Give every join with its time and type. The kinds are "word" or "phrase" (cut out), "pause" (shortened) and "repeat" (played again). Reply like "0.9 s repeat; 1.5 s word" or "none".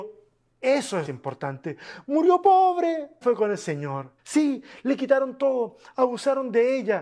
1.1 s phrase; 3.2 s phrase; 4.2 s pause